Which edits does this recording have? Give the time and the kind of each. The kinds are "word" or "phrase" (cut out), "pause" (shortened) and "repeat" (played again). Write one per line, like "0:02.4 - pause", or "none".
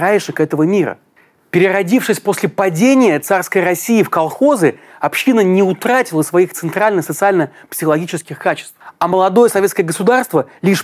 none